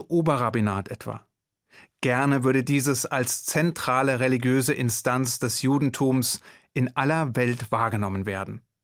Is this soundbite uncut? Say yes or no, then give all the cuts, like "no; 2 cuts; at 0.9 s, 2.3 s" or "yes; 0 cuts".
yes; 0 cuts